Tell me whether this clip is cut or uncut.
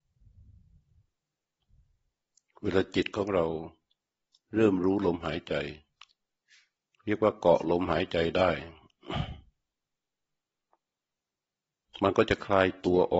uncut